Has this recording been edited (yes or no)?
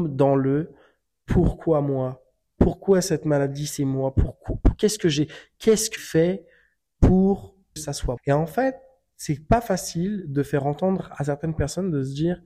yes